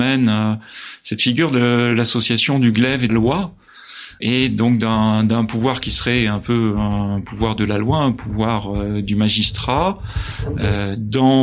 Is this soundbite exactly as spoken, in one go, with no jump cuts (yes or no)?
no